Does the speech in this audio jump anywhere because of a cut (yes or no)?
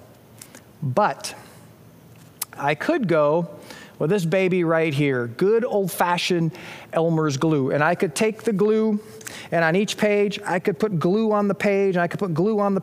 no